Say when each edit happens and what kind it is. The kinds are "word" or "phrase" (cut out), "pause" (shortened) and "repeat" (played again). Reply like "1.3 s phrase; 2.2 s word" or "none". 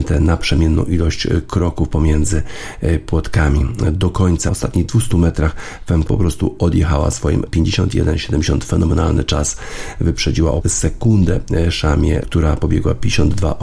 4.5 s word; 6.1 s word; 7.5 s word; 10.6 s word; 12.2 s word